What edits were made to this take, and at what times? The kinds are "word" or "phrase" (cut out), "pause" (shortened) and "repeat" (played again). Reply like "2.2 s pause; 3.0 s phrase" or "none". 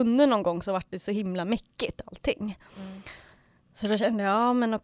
none